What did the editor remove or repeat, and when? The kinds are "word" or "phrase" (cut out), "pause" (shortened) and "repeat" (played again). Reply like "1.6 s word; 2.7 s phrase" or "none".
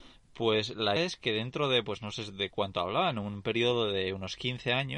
1.0 s word